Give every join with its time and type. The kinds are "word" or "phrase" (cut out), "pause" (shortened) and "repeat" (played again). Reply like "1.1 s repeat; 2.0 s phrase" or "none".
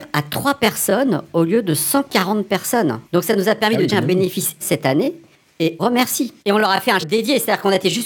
3.1 s pause; 3.9 s word; 4.6 s word; 5.8 s phrase; 6.4 s pause; 7.0 s word